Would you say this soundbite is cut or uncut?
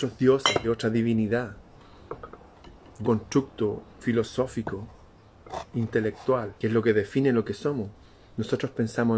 cut